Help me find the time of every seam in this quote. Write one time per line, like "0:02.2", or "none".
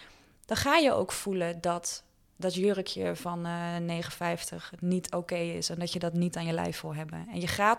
none